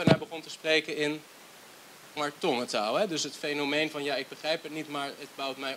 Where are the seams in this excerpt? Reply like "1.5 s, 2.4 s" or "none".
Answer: 2.2 s